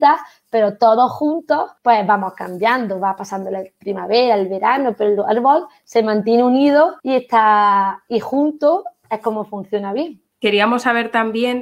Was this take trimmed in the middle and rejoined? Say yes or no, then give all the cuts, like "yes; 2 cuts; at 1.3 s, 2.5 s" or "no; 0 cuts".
yes; 3 cuts; at 1.8 s, 7.0 s, 10.3 s